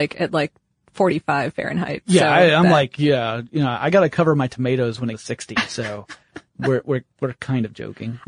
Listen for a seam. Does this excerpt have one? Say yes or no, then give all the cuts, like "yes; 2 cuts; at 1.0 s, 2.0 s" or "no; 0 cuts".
yes; 1 cut; at 5.1 s